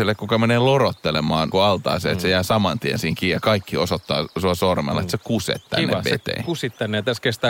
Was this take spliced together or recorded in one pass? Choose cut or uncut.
cut